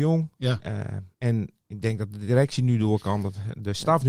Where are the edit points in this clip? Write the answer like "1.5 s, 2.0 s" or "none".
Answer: 1.1 s